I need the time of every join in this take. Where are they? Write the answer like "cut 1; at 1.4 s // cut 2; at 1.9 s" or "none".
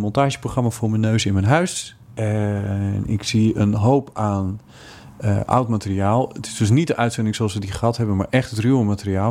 none